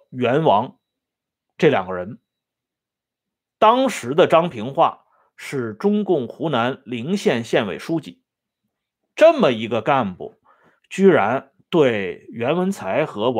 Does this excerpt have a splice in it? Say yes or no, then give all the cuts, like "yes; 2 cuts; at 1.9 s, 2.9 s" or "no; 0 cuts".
no; 0 cuts